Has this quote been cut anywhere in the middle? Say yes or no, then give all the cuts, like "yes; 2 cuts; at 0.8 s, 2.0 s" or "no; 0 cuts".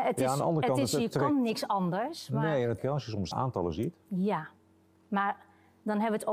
yes; 2 cuts; at 2.8 s, 3.3 s